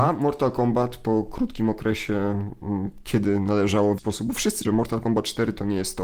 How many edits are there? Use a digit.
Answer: 2